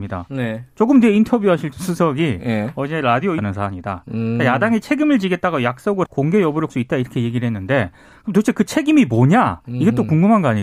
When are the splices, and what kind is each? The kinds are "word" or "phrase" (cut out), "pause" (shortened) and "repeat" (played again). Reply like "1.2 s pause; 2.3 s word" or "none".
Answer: 1.7 s word; 3.4 s phrase; 6.0 s word; 6.7 s word